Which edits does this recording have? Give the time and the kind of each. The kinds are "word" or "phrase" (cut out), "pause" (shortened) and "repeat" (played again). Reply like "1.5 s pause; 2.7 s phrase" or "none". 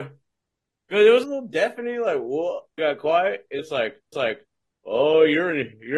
1.2 s phrase; 2.8 s word; 3.6 s word; 4.1 s repeat